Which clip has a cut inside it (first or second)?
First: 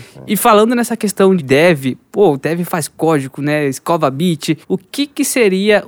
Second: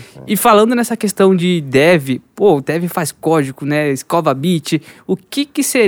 first